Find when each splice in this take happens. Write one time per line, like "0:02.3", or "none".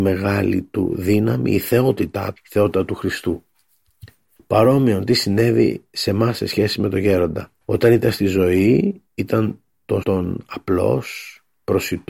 0:02.4
0:04.4
0:07.6
0:09.1
0:10.0